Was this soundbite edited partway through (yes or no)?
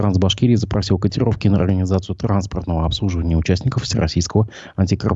no